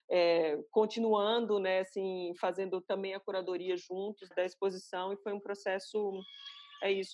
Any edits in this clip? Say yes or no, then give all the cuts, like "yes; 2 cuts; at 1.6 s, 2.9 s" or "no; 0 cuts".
yes; 1 cut; at 4.3 s